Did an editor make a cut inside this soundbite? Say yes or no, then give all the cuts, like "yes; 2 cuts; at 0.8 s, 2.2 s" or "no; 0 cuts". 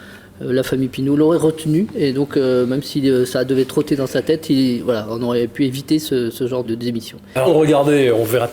yes; 2 cuts; at 6.6 s, 7.4 s